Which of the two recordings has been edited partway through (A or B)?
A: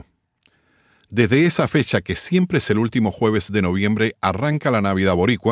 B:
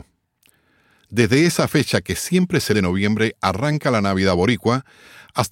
B